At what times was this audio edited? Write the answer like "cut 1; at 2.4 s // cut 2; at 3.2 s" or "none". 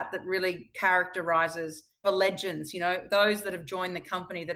cut 1; at 2.0 s